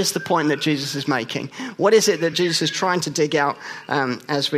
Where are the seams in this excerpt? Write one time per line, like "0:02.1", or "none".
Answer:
none